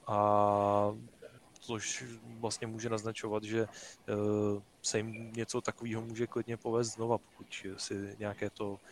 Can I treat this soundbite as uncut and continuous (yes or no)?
no